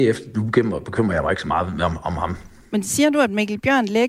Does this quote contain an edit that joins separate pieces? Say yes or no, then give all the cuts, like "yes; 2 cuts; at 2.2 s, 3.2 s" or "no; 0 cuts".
no; 0 cuts